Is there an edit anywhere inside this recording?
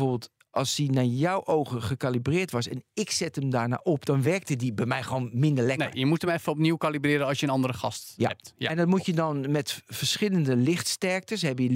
no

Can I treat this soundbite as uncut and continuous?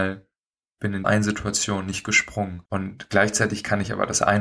no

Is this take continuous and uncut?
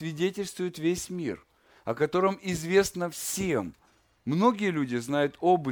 yes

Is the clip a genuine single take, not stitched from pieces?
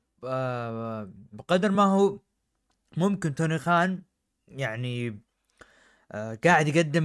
yes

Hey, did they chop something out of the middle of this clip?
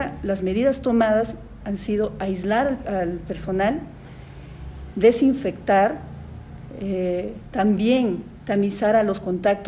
no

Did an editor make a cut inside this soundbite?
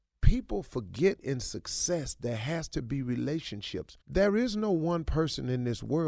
yes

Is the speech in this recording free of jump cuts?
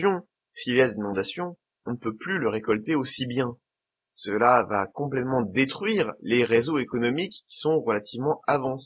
yes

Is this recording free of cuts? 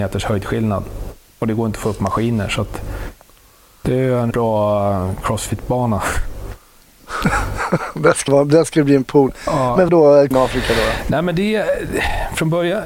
no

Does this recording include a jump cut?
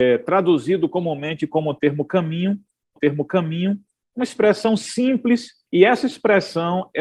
yes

